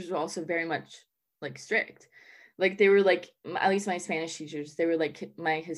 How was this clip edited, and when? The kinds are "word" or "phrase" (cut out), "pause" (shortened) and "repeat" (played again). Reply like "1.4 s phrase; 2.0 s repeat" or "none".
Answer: none

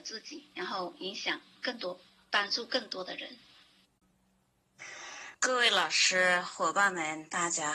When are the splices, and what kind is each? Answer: 2.1 s pause; 5.3 s pause

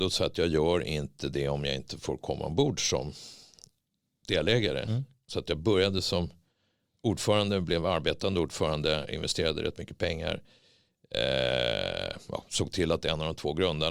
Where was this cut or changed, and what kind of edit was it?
none

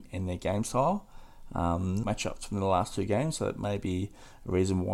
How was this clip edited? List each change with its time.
2.0 s phrase

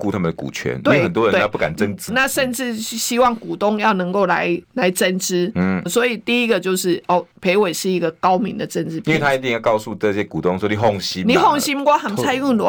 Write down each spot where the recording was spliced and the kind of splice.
2.1 s phrase; 4.6 s pause; 5.9 s word; 7.3 s pause

